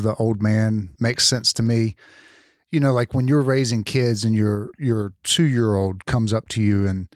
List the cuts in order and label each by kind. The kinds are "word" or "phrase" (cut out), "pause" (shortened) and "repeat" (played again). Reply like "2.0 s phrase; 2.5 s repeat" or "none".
1.0 s word